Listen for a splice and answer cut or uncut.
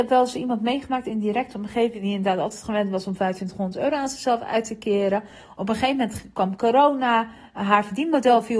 uncut